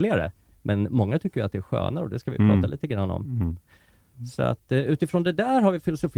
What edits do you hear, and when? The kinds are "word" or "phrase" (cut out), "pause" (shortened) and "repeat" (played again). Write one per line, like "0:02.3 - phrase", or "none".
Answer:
none